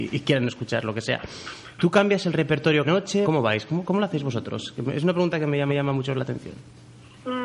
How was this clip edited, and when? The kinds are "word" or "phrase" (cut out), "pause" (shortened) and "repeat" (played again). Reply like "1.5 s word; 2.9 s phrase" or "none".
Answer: 2.8 s word; 3.2 s word; 5.7 s repeat